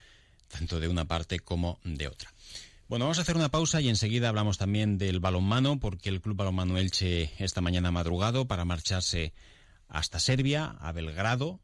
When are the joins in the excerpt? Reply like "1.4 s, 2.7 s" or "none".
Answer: none